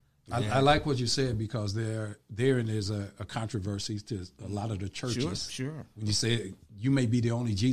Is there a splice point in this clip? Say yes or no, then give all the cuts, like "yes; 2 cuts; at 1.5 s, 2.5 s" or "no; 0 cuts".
no; 0 cuts